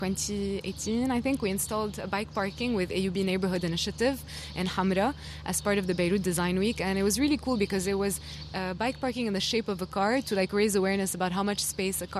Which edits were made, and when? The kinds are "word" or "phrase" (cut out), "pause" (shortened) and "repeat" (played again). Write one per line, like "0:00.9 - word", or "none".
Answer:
none